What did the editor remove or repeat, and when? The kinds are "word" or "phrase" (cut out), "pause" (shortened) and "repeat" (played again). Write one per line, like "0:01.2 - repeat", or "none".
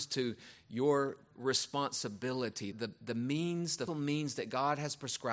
0:01.3 - word
0:02.7 - word
0:03.9 - word

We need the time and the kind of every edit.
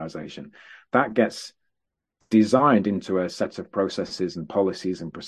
none

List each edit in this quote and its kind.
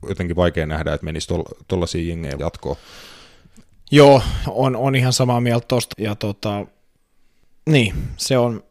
0:01.0 - word
0:02.4 - word
0:04.4 - word
0:05.9 - word

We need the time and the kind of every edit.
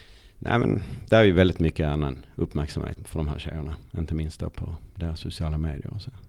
0:03.0 - word

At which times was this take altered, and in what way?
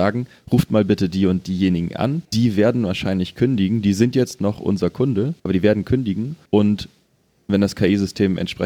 0:02.2 - pause
0:05.4 - pause
0:06.4 - pause

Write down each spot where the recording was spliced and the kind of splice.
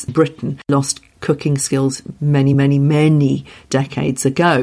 none

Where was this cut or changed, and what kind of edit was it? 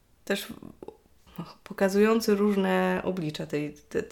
none

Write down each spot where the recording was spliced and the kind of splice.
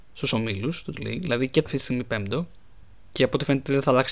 0:00.9 - word
0:01.7 - phrase

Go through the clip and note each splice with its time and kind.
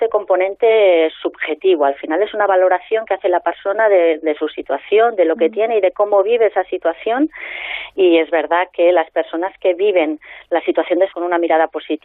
0:11.1 - word

